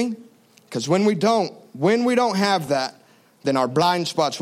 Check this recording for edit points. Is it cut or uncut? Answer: uncut